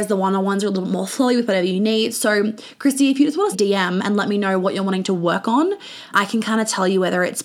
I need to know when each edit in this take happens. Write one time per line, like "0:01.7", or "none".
0:03.5
0:06.1